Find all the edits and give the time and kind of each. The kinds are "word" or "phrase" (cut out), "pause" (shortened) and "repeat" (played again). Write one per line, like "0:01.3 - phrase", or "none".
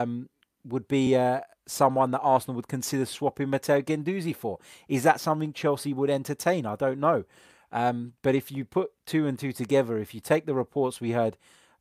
none